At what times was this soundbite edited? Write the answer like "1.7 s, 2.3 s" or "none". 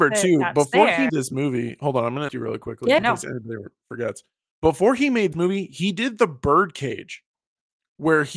1.1 s, 2.3 s, 3.0 s, 5.3 s